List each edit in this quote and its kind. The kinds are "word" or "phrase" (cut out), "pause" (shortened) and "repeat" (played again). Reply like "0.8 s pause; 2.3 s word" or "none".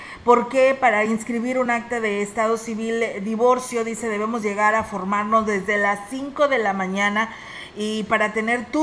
none